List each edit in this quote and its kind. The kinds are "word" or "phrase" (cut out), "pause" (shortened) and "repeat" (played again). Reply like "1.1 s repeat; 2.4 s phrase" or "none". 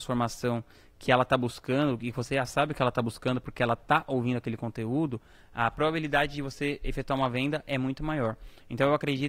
none